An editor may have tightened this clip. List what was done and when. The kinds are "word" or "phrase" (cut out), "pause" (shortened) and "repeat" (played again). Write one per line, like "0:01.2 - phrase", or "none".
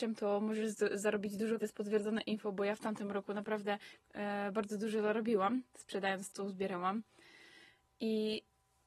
0:01.6 - phrase
0:06.3 - word